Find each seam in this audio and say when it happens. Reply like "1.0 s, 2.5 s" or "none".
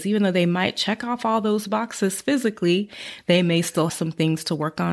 3.9 s